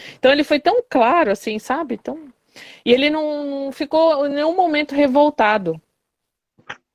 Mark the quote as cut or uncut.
uncut